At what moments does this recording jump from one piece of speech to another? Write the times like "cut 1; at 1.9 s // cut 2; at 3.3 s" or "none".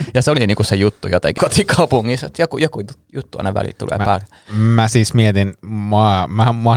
cut 1; at 1.4 s